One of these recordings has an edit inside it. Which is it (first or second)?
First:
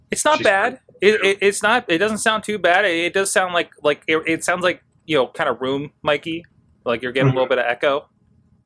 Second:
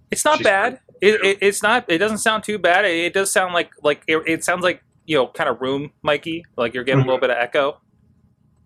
second